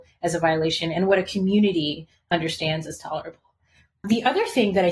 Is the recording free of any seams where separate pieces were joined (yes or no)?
yes